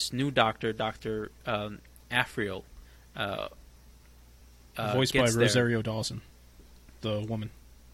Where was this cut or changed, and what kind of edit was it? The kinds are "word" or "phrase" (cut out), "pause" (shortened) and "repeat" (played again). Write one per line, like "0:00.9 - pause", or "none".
none